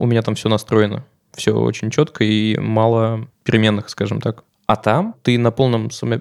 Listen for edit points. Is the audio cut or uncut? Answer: cut